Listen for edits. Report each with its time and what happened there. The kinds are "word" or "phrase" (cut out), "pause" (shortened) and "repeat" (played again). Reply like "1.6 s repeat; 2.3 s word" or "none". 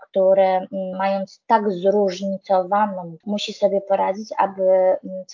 0.9 s word; 3.2 s word